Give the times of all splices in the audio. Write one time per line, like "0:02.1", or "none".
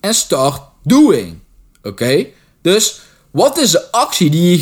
none